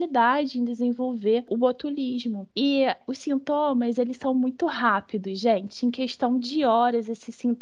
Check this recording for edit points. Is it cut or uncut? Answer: uncut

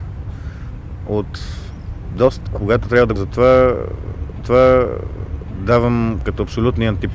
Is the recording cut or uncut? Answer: cut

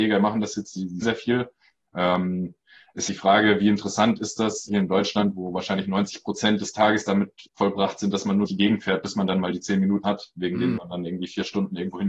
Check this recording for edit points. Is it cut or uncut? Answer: cut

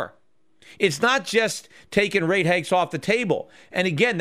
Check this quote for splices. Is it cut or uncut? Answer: uncut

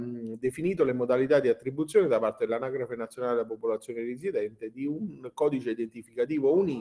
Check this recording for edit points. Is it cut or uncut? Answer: uncut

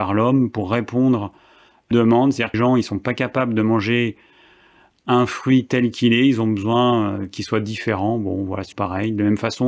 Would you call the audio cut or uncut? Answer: cut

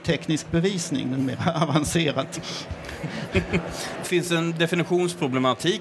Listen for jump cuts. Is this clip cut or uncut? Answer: uncut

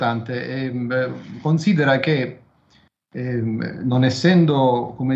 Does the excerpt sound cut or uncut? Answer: uncut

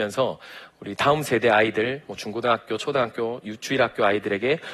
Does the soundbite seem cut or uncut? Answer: uncut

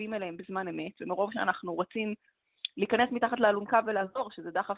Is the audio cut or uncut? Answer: uncut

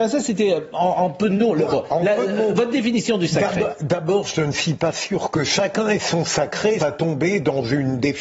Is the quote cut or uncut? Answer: cut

